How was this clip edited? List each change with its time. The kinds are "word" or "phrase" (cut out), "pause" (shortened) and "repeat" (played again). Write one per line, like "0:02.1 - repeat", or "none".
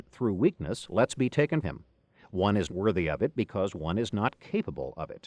0:01.6 - word
0:02.7 - word